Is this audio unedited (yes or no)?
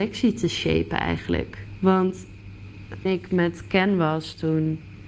no